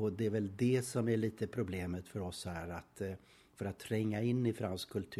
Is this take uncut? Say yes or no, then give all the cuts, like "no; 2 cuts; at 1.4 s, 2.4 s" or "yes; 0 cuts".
yes; 0 cuts